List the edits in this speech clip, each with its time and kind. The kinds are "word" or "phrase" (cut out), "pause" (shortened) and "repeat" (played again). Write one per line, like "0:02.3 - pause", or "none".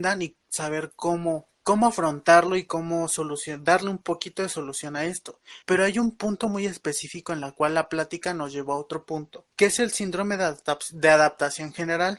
0:01.5 - pause
0:05.6 - pause
0:09.5 - pause